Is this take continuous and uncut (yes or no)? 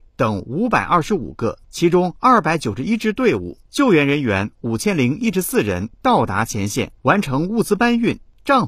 no